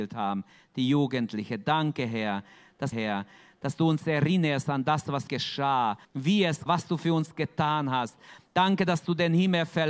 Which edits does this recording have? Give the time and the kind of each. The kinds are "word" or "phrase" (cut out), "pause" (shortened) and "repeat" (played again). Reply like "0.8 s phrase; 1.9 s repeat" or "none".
2.9 s repeat; 5.3 s word; 6.0 s pause; 6.7 s word